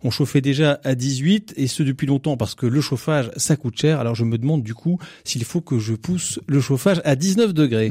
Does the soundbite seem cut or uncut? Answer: uncut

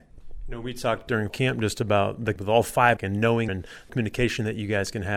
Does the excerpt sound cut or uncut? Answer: cut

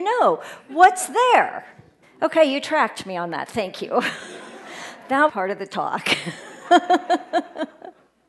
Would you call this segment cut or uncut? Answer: cut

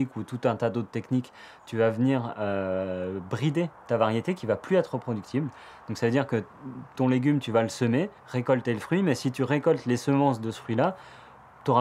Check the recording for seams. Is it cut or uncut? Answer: cut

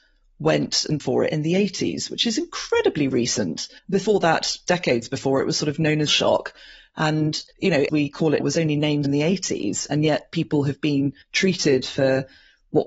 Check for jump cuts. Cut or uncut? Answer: cut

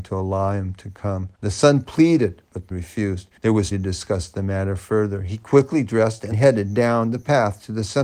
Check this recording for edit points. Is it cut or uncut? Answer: cut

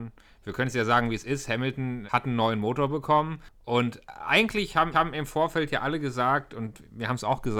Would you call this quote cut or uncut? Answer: cut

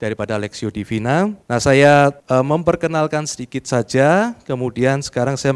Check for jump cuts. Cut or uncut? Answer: cut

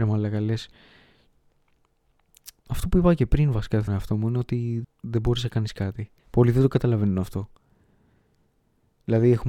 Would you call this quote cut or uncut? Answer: cut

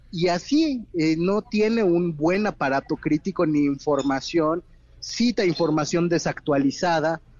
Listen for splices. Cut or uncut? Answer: uncut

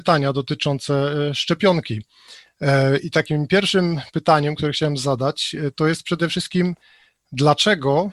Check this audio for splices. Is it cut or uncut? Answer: uncut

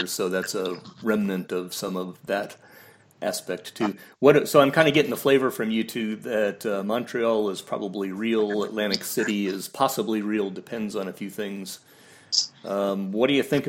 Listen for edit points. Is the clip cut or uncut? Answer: uncut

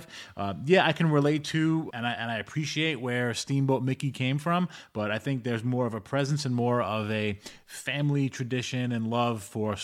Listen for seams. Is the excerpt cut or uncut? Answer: cut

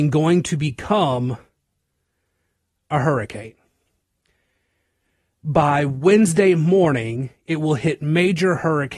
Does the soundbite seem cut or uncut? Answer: uncut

